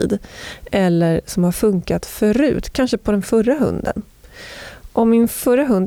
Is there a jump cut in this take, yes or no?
no